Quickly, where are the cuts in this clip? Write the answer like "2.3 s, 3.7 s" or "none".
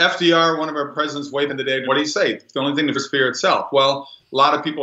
1.5 s, 1.8 s, 2.9 s